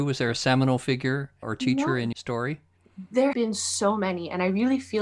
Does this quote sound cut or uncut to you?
cut